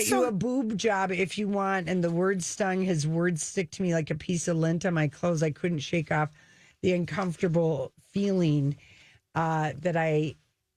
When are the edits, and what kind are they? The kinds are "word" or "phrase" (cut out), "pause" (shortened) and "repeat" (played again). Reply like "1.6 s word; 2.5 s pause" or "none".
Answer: none